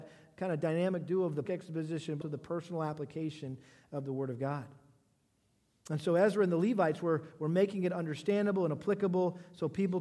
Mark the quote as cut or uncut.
cut